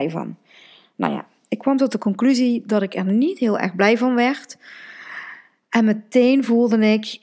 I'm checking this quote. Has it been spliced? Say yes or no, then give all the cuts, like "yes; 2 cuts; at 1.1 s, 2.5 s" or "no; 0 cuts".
no; 0 cuts